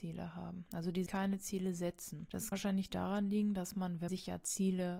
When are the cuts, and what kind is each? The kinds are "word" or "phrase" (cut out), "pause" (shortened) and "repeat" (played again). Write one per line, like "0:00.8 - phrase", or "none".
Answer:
0:01.1 - word
0:02.5 - word
0:04.1 - word